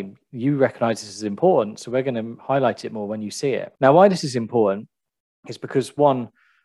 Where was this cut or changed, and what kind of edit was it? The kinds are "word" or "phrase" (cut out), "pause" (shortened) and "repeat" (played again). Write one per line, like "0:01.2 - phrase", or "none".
0:03.8 - pause

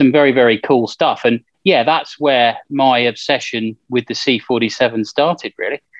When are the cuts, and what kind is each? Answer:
none

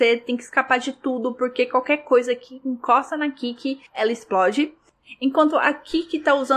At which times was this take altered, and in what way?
0:03.9 - pause

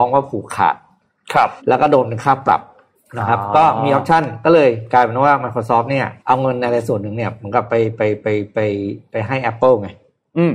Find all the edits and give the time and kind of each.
0:01.6 - pause
0:02.9 - pause
0:06.2 - pause

